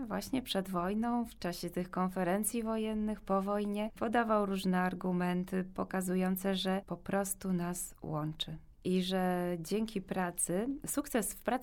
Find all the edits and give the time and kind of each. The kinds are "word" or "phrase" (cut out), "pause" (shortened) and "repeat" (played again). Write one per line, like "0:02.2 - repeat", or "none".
0:06.8 - word